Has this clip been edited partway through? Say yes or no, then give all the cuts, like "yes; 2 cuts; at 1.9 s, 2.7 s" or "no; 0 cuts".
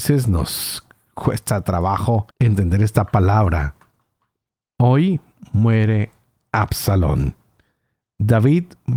yes; 1 cut; at 2.3 s